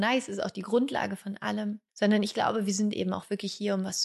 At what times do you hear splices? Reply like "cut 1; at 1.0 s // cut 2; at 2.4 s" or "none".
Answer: cut 1; at 1.9 s